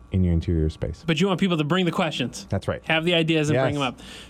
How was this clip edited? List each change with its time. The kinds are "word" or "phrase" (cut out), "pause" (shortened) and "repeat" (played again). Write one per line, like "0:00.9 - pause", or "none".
none